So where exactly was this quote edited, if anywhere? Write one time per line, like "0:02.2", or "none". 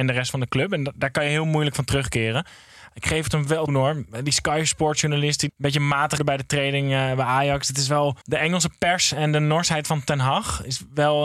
0:03.7
0:05.5
0:06.2
0:08.2